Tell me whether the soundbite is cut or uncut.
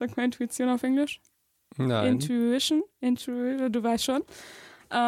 uncut